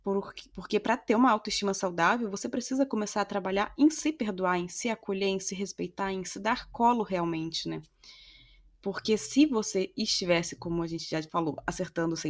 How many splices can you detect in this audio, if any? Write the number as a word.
zero